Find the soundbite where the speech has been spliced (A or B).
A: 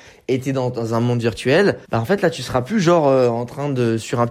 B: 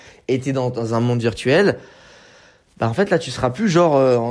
A